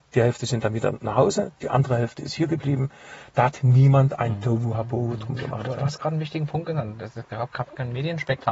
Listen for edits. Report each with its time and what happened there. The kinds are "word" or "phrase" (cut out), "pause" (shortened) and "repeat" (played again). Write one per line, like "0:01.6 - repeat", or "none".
none